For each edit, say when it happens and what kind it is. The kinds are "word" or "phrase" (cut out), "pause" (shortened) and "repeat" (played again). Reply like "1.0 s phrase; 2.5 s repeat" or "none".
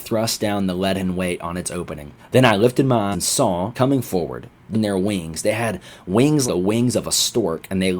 2.2 s pause; 3.1 s word; 3.7 s phrase; 4.7 s phrase; 6.5 s word